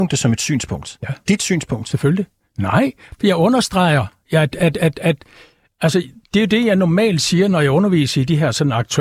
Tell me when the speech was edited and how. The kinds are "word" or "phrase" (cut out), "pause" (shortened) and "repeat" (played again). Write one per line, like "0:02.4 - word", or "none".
none